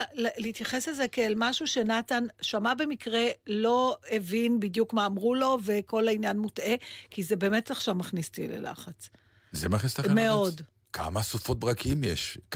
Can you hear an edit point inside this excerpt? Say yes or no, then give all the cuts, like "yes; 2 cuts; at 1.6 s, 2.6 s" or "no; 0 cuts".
no; 0 cuts